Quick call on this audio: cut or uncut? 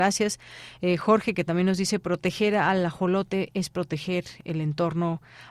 uncut